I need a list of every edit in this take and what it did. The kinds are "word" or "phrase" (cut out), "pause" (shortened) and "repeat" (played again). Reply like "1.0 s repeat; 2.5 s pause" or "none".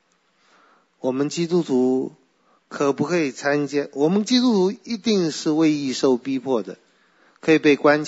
none